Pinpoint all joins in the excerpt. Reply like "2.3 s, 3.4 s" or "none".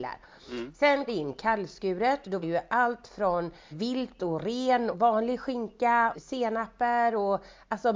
1.1 s, 2.4 s, 3.7 s, 4.9 s, 6.1 s